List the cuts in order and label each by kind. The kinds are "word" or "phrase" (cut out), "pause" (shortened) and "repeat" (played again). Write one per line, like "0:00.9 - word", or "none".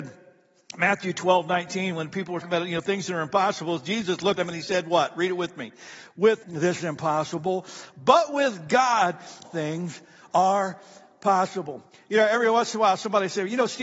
0:02.4 - word
0:04.4 - word
0:06.4 - word
0:06.8 - word
0:09.4 - word